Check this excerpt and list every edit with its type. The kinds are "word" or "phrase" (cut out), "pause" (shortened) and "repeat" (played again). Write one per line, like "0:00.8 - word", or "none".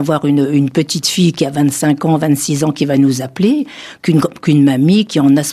none